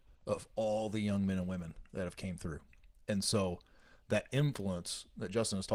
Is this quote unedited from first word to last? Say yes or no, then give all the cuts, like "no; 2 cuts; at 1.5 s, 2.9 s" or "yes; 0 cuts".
yes; 0 cuts